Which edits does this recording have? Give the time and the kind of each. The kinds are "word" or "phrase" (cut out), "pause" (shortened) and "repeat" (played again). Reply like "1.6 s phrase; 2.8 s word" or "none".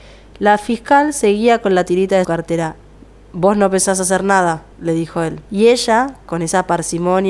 2.2 s word; 4.7 s pause; 5.4 s pause